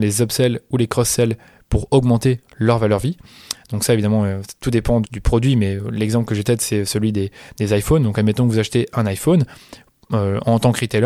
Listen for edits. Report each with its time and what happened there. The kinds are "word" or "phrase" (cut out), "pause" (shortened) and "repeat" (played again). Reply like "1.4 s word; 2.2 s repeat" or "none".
5.0 s word; 6.4 s phrase